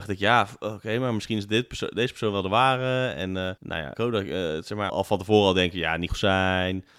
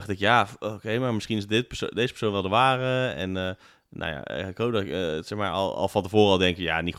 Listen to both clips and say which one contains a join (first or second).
first